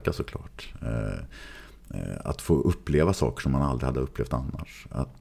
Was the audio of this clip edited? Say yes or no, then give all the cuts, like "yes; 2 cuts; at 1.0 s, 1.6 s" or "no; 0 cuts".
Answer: no; 0 cuts